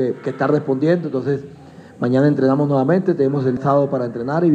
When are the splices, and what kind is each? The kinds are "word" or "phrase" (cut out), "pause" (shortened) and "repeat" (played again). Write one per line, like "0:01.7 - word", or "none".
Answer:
0:03.6 - word